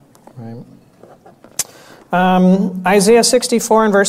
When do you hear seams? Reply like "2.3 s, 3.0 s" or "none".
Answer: none